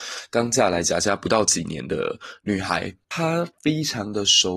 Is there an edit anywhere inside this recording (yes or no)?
yes